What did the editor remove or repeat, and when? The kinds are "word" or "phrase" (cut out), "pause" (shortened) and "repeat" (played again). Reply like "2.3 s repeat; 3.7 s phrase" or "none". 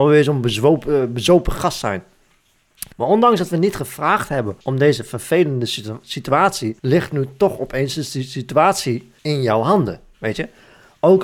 2.9 s pause; 4.6 s pause; 6.8 s pause; 9.2 s pause